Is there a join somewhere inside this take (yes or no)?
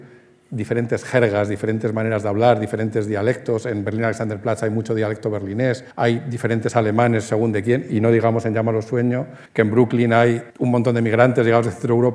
yes